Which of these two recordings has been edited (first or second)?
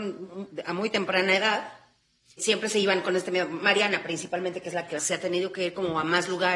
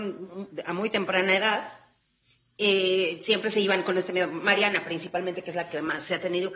first